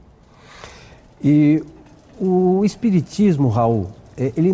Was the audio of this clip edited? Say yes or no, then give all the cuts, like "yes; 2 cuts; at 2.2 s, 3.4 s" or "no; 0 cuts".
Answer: no; 0 cuts